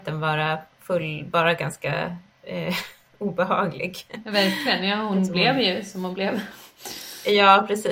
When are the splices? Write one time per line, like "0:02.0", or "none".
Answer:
none